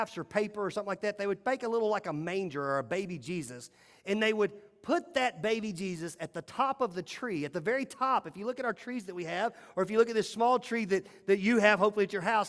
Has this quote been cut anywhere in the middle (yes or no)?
no